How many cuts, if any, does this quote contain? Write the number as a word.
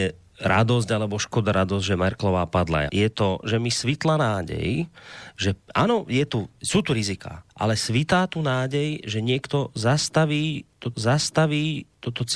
five